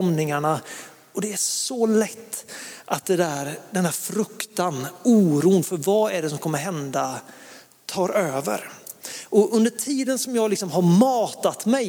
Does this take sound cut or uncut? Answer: uncut